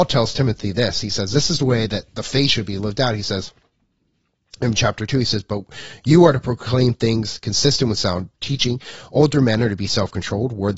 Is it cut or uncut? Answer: uncut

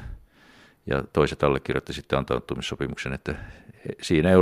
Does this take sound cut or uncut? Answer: uncut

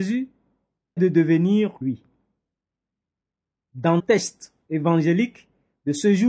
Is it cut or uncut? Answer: cut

